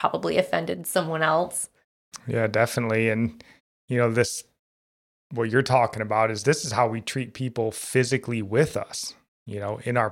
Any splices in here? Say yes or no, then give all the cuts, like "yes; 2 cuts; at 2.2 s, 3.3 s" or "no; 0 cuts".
no; 0 cuts